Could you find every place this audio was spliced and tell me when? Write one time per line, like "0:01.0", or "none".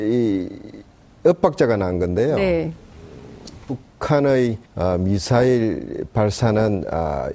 0:04.7

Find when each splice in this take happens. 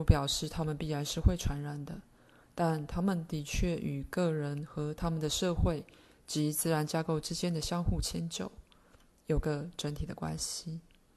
none

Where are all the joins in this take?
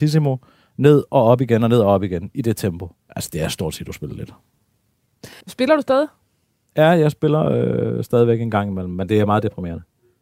0:03.0
0:05.4

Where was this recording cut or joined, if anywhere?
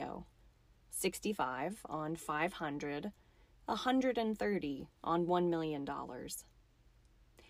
none

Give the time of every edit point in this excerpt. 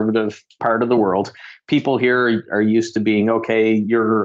none

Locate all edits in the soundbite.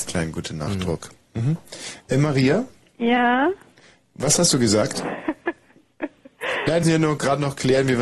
0:06.8

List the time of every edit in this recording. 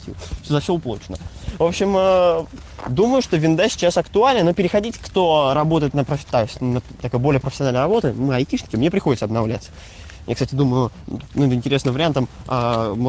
none

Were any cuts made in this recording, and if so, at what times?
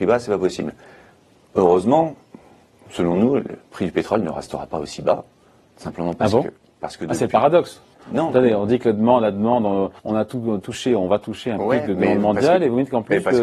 0:07.9
0:10.0

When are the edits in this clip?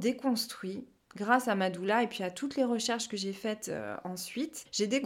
none

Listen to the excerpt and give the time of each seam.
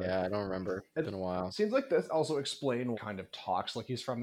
0:01.0
0:02.9

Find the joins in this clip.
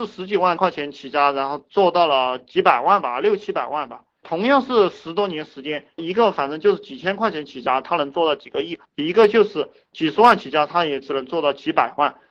0:08.9

